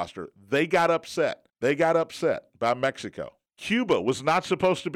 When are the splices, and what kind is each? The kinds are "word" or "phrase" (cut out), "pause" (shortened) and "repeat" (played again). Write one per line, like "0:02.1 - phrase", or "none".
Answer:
0:01.5 - pause
0:03.5 - pause